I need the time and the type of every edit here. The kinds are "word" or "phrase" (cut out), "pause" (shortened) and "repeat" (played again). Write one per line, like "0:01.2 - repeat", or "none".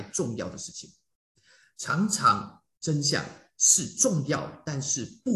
none